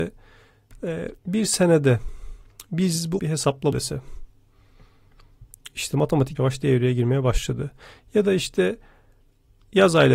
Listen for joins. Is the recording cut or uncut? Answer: cut